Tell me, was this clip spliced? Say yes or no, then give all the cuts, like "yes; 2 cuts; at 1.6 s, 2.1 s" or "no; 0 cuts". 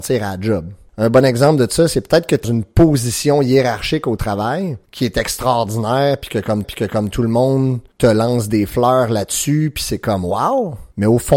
yes; 2 cuts; at 2.4 s, 6.6 s